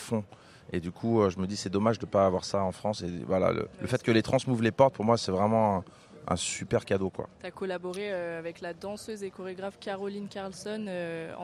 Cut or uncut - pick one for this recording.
cut